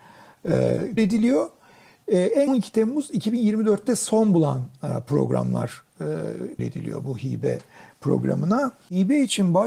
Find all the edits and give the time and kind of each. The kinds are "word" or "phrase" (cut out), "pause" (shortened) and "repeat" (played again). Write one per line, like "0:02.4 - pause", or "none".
0:01.0 - word
0:02.5 - word
0:06.6 - word